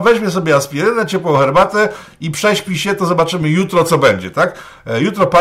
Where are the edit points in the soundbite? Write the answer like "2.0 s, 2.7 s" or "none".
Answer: none